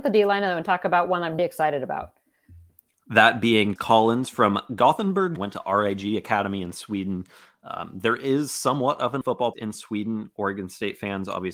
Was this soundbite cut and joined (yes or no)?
yes